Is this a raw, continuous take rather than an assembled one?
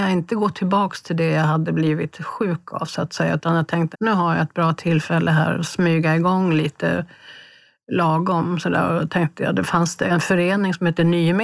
no; 1 cut; at 3.9 s

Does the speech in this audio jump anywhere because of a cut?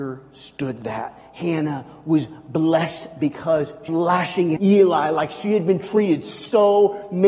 yes; 2 cuts; at 3.9 s, 4.6 s

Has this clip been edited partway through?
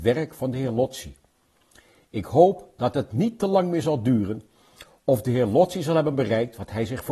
no; 0 cuts

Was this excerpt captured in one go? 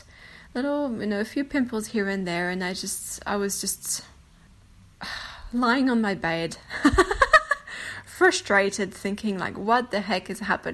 yes; 0 cuts

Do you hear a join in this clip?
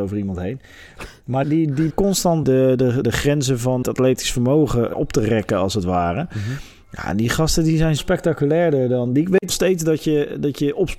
yes; 8 cuts; at 1.4 s, 1.9 s, 2.4 s, 3.0 s, 3.8 s, 4.9 s, 8.0 s, 9.5 s

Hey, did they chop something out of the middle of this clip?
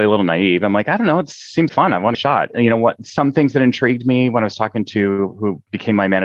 yes; 2 cuts; at 1.7 s, 2.1 s

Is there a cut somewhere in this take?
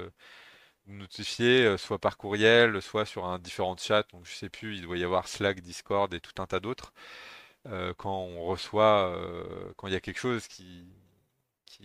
no; 0 cuts

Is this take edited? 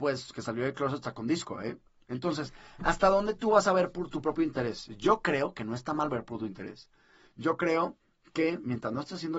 no; 0 cuts

